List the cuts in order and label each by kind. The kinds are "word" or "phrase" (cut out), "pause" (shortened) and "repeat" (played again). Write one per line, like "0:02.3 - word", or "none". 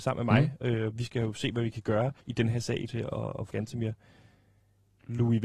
0:02.2 - pause
0:02.9 - word
0:03.5 - word

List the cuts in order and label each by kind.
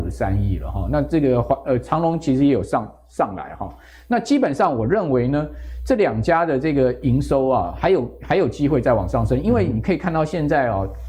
none

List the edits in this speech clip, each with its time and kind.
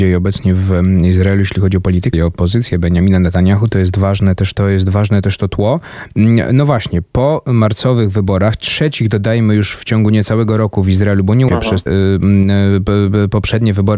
0:02.1 - word
0:04.5 - word
0:11.5 - phrase
0:11.9 - word

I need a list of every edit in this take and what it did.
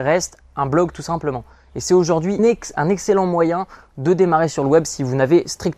0:02.4 - word

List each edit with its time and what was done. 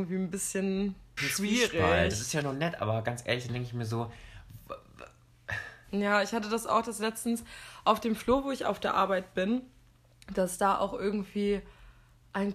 0:01.2 - word
0:02.4 - word

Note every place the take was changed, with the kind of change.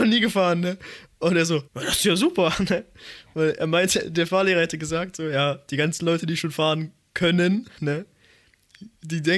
0:01.7 - pause

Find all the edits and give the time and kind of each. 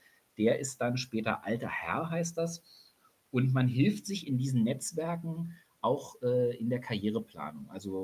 none

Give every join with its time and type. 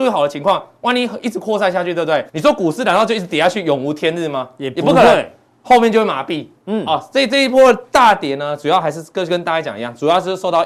0:02.3 - pause

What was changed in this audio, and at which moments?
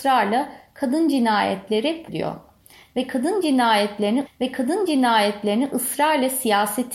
0:02.1 - word
0:04.3 - repeat

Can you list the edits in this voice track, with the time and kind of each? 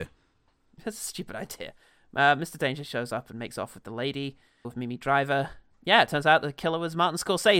0:04.6 - word

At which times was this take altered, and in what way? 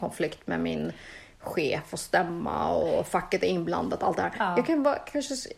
none

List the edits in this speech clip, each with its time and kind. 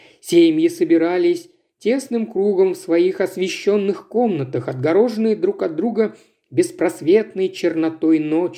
none

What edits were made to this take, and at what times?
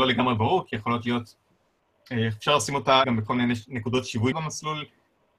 0:03.0 - word
0:04.3 - word

